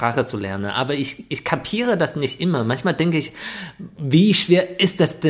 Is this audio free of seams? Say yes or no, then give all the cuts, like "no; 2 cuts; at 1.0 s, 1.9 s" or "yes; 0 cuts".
yes; 0 cuts